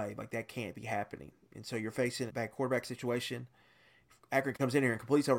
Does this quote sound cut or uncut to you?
cut